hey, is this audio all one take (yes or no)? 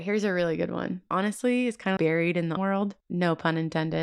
no